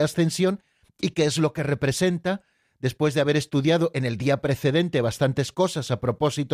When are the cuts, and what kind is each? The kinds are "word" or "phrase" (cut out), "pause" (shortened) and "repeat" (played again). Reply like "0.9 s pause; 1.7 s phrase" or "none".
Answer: none